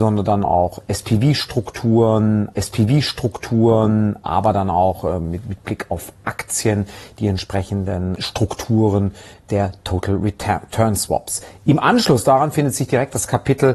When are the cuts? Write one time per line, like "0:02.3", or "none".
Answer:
0:02.5